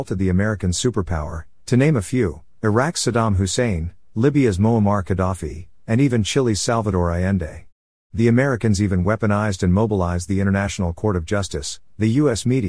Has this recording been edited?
no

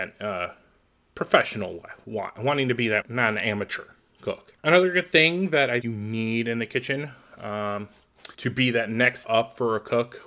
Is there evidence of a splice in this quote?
yes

